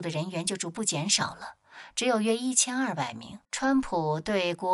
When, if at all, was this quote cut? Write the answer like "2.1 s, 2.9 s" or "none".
3.4 s